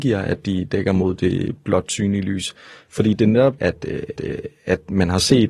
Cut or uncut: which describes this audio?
cut